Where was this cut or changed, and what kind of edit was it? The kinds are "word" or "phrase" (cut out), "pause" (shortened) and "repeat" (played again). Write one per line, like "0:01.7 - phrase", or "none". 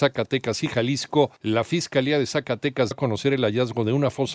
0:01.4 - pause
0:02.9 - word